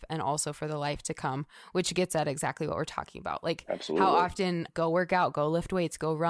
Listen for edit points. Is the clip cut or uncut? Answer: cut